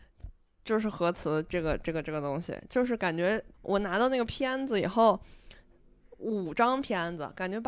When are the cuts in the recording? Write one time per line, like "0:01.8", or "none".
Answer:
0:03.5